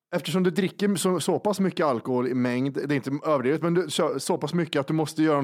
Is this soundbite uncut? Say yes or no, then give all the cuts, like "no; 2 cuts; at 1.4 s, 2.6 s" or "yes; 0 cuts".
yes; 0 cuts